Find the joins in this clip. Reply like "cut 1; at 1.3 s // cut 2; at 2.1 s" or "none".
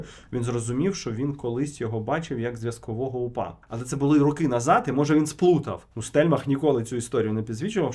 cut 1; at 3.6 s // cut 2; at 5.9 s